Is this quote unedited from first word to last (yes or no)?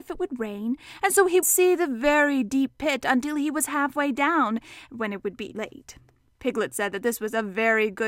no